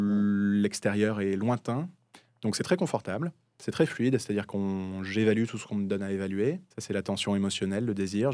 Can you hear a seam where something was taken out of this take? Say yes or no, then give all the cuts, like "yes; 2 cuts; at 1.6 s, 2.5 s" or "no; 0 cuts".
yes; 1 cut; at 6.7 s